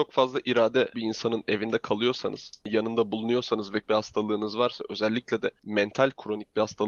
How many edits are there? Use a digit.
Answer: 2